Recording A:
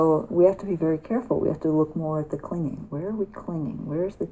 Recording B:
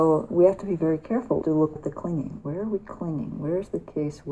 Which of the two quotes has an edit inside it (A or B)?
B